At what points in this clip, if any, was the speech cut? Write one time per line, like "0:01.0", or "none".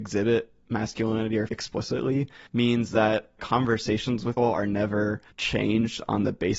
0:01.5
0:02.5
0:03.4
0:04.4
0:05.3